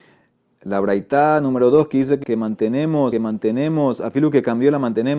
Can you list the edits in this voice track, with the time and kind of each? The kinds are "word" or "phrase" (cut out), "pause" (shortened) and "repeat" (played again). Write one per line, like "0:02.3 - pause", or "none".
0:02.2 - word
0:03.1 - repeat